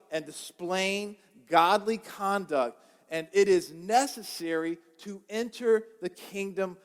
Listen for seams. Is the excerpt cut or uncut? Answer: uncut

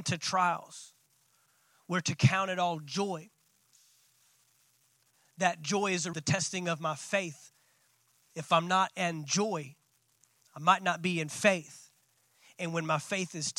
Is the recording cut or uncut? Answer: cut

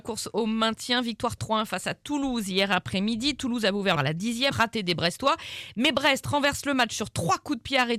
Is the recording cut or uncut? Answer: cut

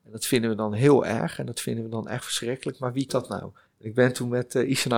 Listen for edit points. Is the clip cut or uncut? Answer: cut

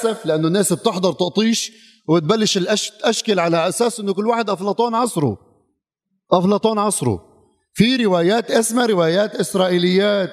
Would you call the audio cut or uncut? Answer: uncut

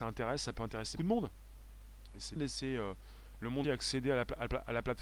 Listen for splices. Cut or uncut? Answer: cut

